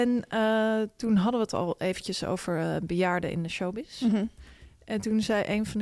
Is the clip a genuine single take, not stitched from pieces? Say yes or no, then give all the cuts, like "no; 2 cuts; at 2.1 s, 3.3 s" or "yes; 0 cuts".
yes; 0 cuts